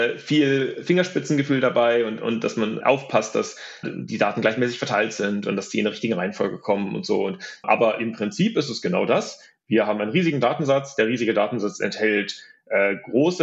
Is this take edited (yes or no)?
yes